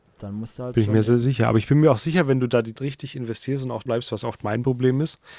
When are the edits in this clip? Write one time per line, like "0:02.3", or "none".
0:02.8
0:03.9